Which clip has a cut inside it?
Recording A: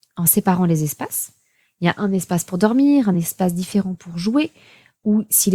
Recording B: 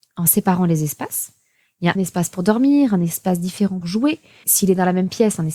B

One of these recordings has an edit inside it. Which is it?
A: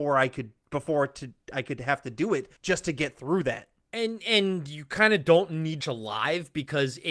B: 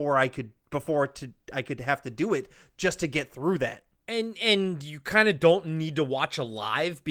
A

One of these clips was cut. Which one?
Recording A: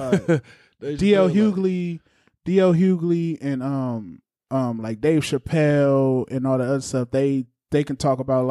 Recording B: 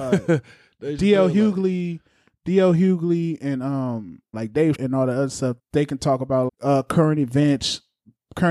B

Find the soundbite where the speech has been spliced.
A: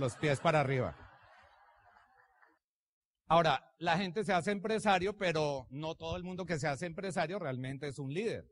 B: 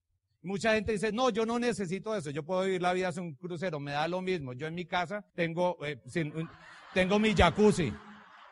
B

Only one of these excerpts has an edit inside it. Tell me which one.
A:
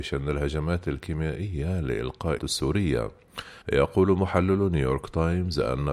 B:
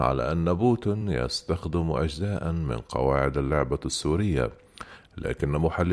A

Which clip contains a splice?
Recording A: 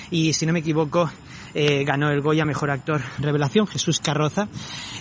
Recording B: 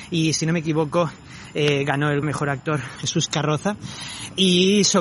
B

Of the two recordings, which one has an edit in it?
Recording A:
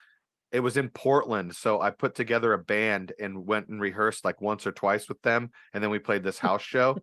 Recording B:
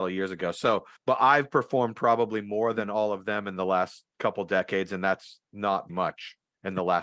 B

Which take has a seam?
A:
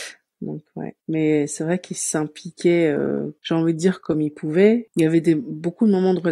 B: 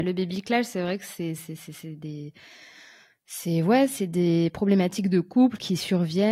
A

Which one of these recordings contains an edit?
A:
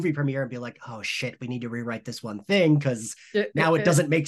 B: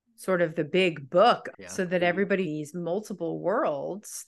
B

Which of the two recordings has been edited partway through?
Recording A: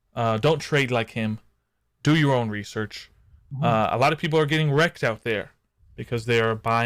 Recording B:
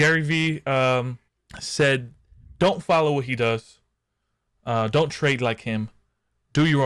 B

